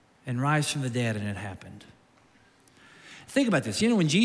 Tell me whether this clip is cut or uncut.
uncut